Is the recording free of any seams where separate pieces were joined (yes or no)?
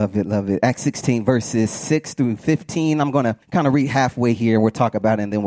no